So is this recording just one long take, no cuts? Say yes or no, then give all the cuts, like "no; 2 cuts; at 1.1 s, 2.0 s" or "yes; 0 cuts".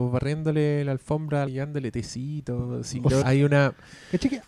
no; 2 cuts; at 1.5 s, 3.2 s